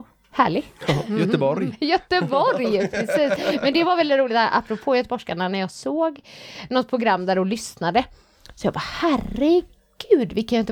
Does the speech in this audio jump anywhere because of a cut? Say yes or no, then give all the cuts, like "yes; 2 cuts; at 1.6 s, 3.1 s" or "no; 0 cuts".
no; 0 cuts